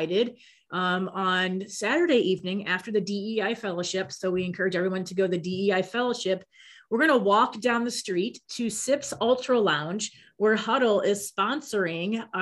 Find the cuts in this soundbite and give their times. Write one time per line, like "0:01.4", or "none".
none